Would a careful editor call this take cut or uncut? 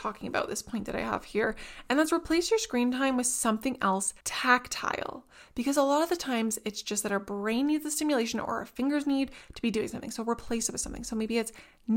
cut